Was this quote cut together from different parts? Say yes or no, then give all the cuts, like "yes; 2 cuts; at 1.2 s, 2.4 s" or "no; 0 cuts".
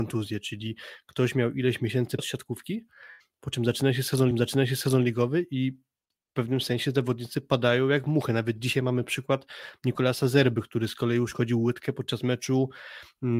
yes; 2 cuts; at 2.2 s, 4.3 s